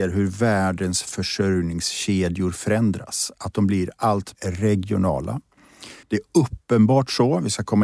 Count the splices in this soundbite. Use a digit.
2